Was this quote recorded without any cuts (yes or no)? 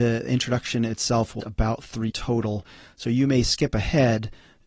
no